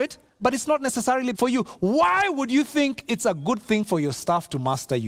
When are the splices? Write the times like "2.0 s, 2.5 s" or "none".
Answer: 1.3 s